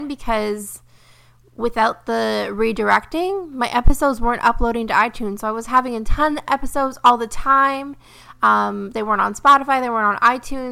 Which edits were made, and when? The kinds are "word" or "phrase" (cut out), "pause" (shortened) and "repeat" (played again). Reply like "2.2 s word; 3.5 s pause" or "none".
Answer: none